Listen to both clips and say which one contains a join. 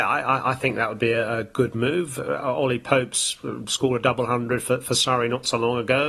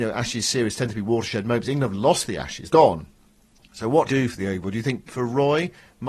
second; 3 cuts; at 2.7 s, 4.1 s, 5.1 s

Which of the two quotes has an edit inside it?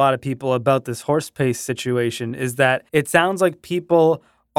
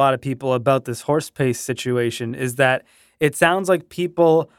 first; 1 cut; at 2.9 s

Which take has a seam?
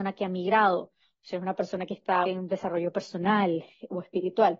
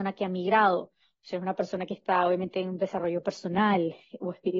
first; 1 cut; at 2.2 s

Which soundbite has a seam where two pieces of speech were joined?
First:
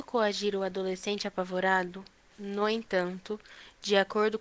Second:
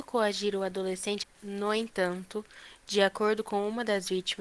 second; 1 cut; at 1.2 s

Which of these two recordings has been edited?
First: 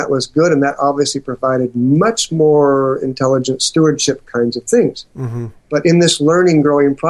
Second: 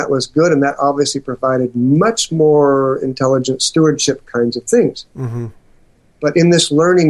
first; 1 cut; at 5.6 s

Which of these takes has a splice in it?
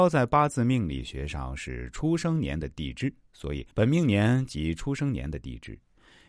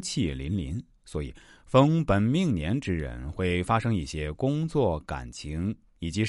first; 1 cut; at 3.7 s

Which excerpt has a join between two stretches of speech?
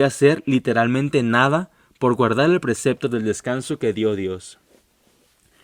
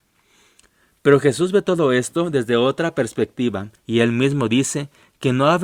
second; 1 cut; at 3.8 s

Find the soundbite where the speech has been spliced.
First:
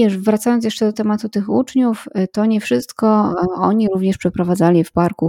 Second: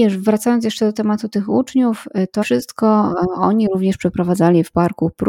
second; 1 cut; at 2.4 s

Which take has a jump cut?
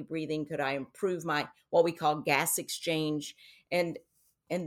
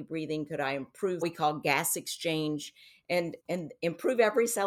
second; 2 cuts; at 1.2 s, 3.4 s

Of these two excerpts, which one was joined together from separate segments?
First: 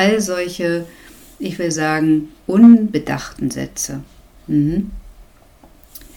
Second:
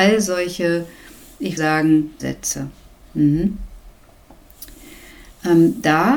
second; 2 cuts; at 1.6 s, 2.2 s

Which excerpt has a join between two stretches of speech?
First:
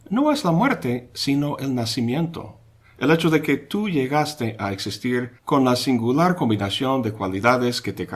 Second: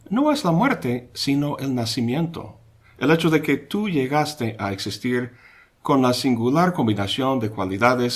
first; 1 cut; at 5.4 s

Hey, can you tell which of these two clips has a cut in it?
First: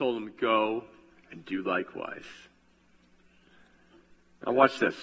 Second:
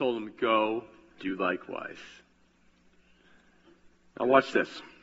second; 1 cut; at 1.2 s

